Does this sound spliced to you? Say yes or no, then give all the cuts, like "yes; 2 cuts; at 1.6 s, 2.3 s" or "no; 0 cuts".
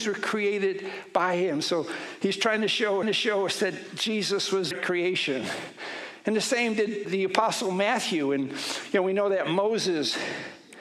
yes; 3 cuts; at 3.0 s, 4.7 s, 7.0 s